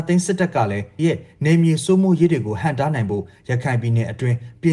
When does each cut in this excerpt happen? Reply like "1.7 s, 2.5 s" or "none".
1.0 s